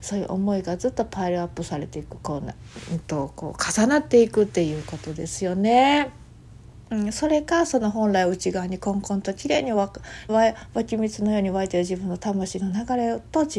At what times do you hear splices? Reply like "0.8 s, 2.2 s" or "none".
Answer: 10.3 s